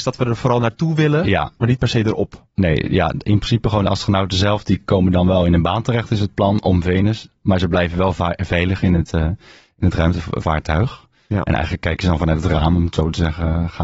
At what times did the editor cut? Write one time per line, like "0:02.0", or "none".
none